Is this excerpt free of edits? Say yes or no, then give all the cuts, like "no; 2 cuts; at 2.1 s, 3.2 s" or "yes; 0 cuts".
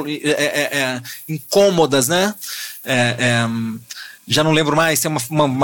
no; 1 cut; at 4.2 s